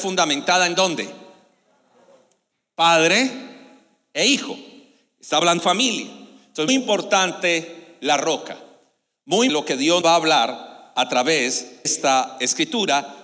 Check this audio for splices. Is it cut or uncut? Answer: cut